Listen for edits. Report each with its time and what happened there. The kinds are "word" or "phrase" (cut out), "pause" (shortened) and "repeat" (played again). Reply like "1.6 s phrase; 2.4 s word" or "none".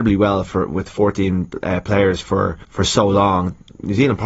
2.6 s pause